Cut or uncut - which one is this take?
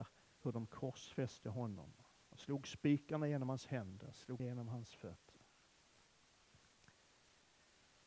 cut